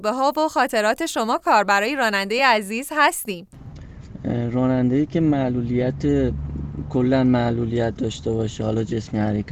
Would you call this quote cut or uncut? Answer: uncut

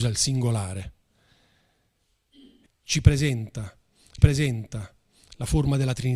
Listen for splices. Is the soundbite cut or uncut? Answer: cut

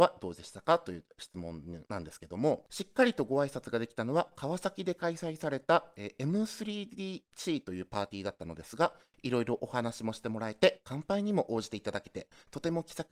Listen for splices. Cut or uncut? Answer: uncut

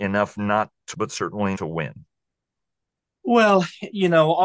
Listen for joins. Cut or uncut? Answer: cut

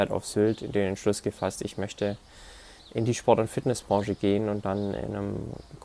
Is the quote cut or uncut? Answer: uncut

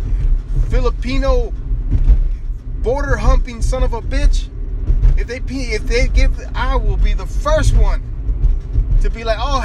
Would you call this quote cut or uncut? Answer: uncut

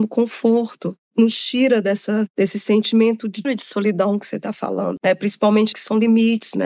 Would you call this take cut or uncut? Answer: cut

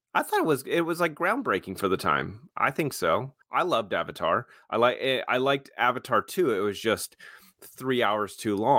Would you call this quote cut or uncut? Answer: cut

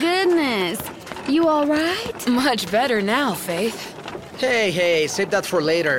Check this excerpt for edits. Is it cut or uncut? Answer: uncut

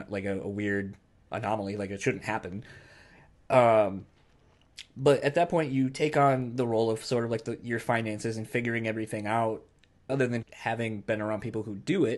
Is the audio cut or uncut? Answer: cut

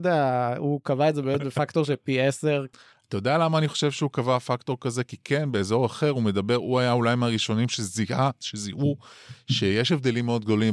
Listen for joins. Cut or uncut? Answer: uncut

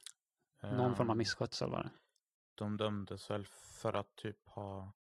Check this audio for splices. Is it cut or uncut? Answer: uncut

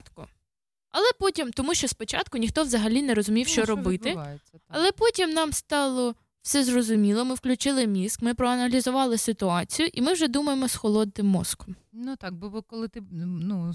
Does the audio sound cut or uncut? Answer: uncut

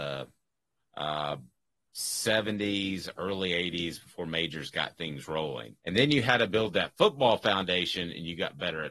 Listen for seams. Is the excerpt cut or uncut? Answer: cut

